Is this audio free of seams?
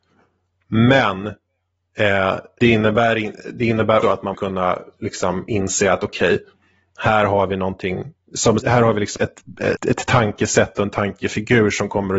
no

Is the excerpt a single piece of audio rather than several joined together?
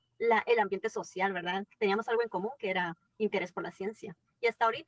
yes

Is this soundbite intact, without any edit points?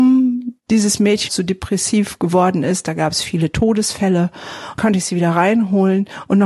no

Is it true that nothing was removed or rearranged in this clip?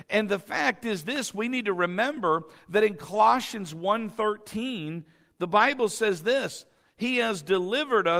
yes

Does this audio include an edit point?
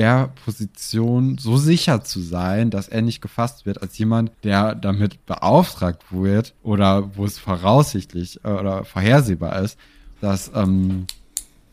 yes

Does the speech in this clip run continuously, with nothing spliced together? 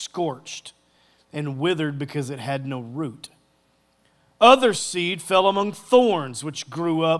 yes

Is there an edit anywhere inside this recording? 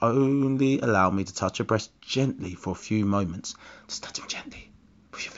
no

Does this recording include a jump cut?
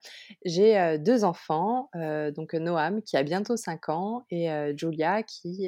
no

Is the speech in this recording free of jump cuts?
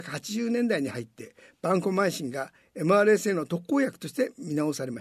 yes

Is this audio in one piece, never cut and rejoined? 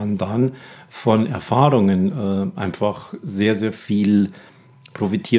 yes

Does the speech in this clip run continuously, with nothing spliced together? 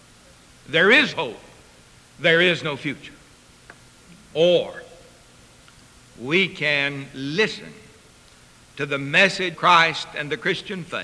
no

